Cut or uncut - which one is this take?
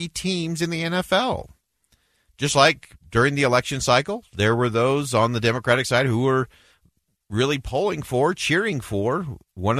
uncut